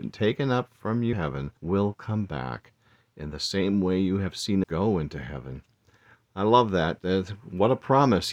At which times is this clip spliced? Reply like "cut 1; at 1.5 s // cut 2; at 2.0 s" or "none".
cut 1; at 1.1 s // cut 2; at 1.6 s // cut 3; at 4.6 s